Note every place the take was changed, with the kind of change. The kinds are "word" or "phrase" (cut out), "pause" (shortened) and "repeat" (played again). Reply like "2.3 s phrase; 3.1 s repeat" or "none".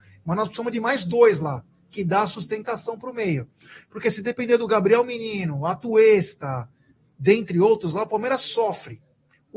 none